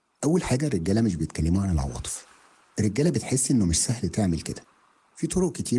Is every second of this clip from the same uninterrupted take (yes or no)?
yes